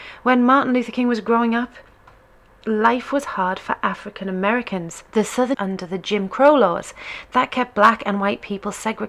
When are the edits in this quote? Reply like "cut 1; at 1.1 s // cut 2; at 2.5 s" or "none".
cut 1; at 5.1 s // cut 2; at 5.5 s

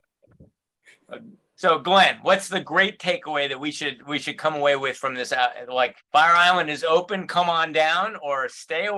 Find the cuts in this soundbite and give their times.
cut 1; at 6.0 s

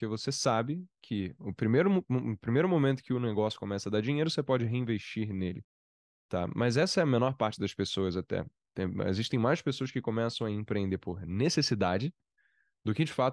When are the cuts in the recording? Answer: none

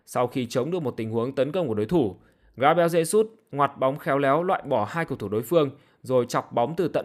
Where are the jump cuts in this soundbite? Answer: none

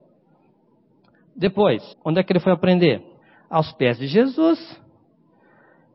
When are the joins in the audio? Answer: cut 1; at 1.9 s // cut 2; at 3.2 s

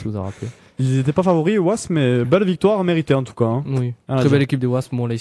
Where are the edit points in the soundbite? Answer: none

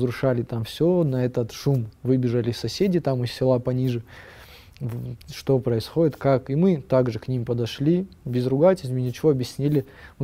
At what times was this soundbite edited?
none

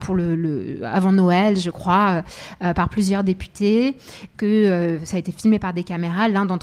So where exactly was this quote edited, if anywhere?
cut 1; at 4.3 s

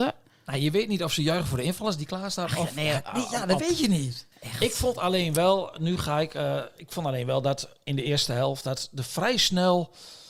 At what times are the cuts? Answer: cut 1; at 4.3 s

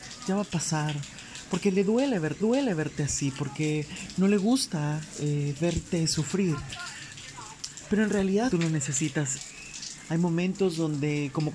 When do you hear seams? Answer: cut 1; at 2.4 s // cut 2; at 8.5 s

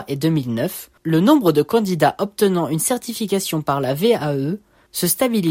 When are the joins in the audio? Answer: cut 1; at 1.0 s

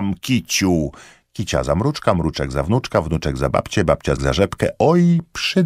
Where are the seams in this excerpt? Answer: cut 1; at 4.2 s

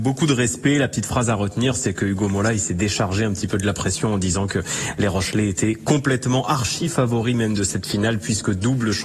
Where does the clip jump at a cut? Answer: none

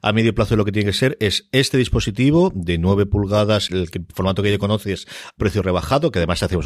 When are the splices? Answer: cut 1; at 3.7 s // cut 2; at 5.4 s

